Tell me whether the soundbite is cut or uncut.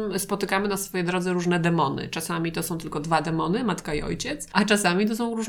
uncut